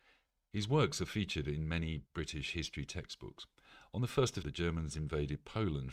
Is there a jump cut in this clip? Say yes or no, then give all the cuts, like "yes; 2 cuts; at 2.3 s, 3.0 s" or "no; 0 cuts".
yes; 2 cuts; at 2.1 s, 4.4 s